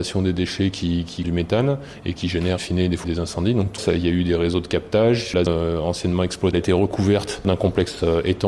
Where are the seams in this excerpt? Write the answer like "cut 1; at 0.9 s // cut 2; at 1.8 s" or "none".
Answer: cut 1; at 1.2 s // cut 2; at 2.6 s // cut 3; at 3.0 s // cut 4; at 3.8 s // cut 5; at 5.5 s // cut 6; at 6.5 s